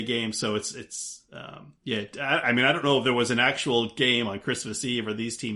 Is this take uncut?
no; 1 cut; at 1.8 s

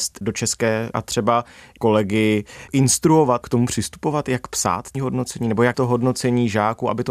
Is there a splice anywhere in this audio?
yes; 5 cuts; at 0.9 s, 1.8 s, 3.4 s, 4.9 s, 5.7 s

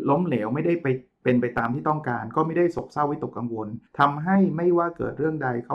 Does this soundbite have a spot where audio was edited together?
yes; 1 cut; at 3.9 s

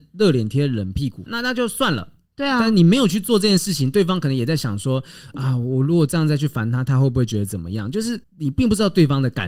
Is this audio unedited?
yes; 0 cuts

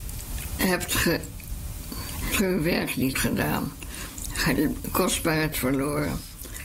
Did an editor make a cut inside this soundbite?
yes; 3 cuts; at 2.3 s, 3.1 s, 5.5 s

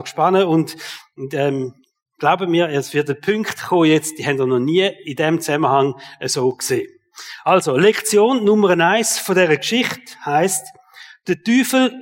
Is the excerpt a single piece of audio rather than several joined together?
yes; 0 cuts

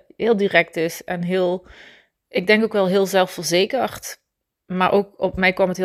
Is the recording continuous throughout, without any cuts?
yes; 0 cuts

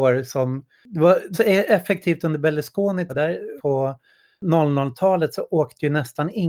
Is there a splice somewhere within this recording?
yes; 3 cuts; at 1.3 s, 3.1 s, 3.6 s

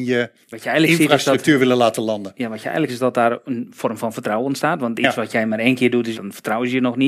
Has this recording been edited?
yes; 2 cuts; at 2.9 s, 6.1 s

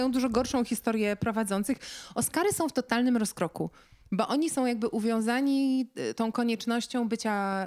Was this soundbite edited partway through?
no; 0 cuts

